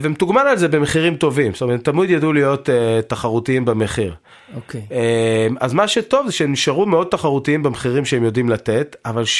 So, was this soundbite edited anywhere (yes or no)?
no